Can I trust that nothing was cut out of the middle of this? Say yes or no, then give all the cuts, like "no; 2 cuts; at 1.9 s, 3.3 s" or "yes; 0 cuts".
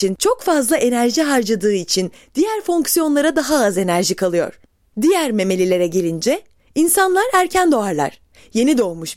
yes; 0 cuts